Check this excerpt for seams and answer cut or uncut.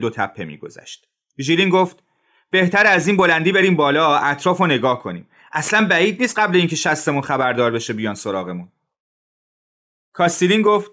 uncut